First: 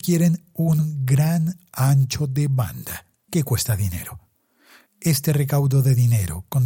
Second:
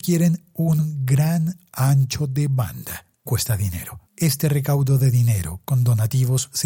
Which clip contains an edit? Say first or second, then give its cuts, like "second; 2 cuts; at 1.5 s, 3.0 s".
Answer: second; 2 cuts; at 3.3 s, 4.1 s